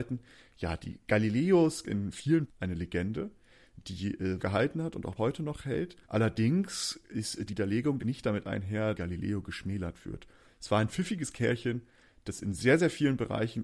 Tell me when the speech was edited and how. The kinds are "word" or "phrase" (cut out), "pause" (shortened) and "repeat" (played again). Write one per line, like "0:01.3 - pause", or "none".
0:01.8 - phrase
0:02.5 - phrase
0:04.4 - phrase
0:05.2 - word
0:06.0 - pause
0:07.5 - word
0:08.0 - phrase
0:08.9 - phrase